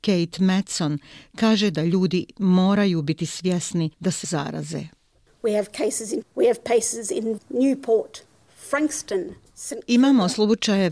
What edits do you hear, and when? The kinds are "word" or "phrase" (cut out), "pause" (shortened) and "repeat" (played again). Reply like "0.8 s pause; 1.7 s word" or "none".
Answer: 3.9 s pause; 4.2 s phrase; 6.2 s word; 7.4 s word